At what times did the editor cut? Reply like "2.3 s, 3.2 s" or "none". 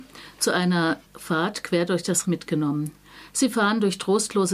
1.0 s, 2.2 s